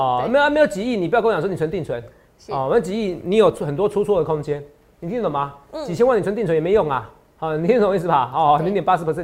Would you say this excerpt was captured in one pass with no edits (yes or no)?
yes